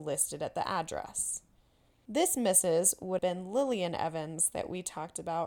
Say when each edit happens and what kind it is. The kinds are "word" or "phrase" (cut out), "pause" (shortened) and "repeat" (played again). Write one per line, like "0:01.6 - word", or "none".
0:03.2 - word